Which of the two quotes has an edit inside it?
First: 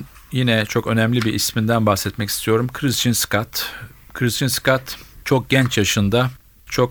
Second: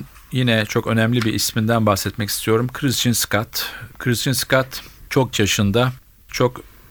second; 2 cuts; at 3.9 s, 5.3 s

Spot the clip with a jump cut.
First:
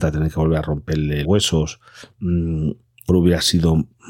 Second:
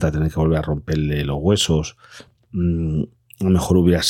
first; 3 cuts; at 1.2 s, 2.1 s, 3.1 s

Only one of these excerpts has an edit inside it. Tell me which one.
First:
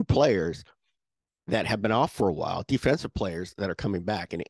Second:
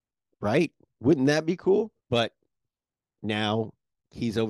second; 1 cut; at 2.0 s

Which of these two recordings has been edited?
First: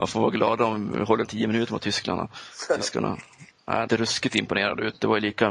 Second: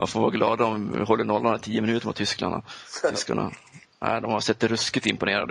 first; 2 cuts; at 1.2 s, 3.9 s

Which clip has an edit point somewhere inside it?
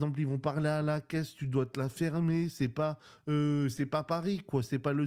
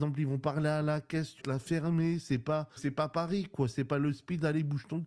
second; 2 cuts; at 1.4 s, 2.8 s

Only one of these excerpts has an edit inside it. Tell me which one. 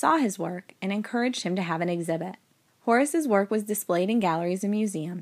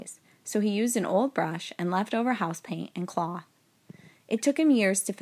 first; 1 cut; at 2.7 s

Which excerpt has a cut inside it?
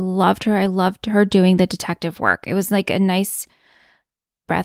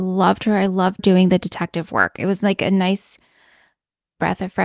second; 1 cut; at 1.0 s

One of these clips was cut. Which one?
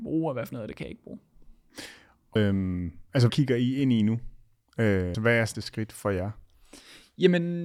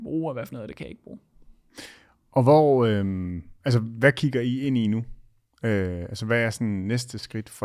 first; 4 cuts; at 2.4 s, 3.3 s, 5.1 s, 5.5 s

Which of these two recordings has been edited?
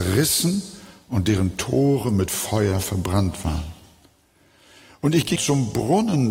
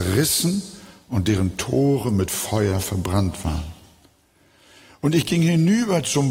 first; 1 cut; at 5.4 s

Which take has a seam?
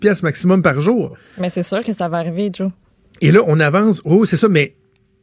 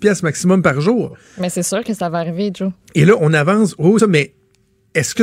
second; 2 cuts; at 2.8 s, 4.0 s

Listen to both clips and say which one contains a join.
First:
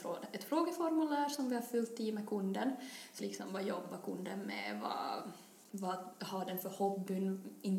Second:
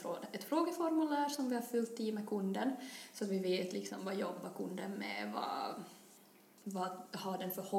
first; 2 cuts; at 3.2 s, 5.6 s

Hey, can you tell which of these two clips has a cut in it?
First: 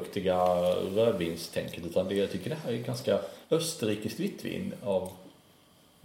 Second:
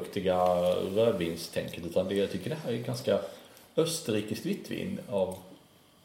first; 1 cut; at 3.4 s

